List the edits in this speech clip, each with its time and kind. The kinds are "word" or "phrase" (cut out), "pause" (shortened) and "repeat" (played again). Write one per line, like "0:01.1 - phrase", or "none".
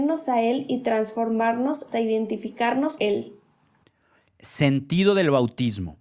0:01.9 - word
0:03.0 - word

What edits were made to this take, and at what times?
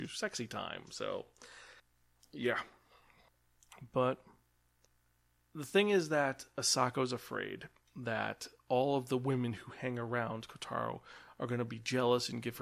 none

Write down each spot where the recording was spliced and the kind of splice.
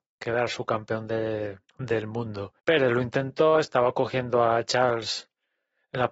0:01.7 - pause
0:02.6 - pause

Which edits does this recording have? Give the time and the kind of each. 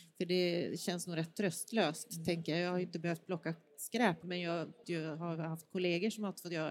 0:04.2 - word
0:04.8 - word

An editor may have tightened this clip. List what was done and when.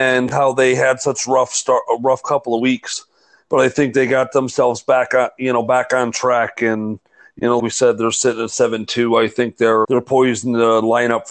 0:07.6 - word
0:09.8 - word

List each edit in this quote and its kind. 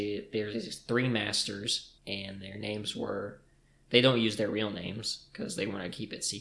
0:02.0 - pause

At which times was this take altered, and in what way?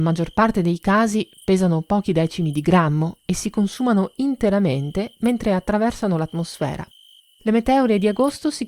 none

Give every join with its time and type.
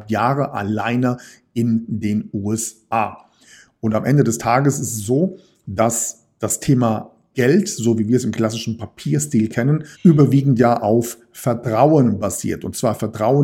0:09.9 - pause

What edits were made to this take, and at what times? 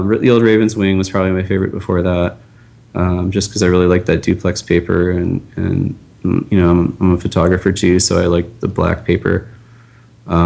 none

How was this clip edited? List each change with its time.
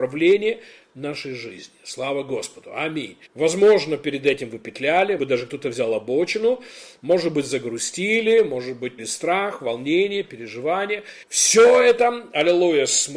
0:03.3 - pause
0:05.2 - word
0:09.0 - word
0:11.2 - pause

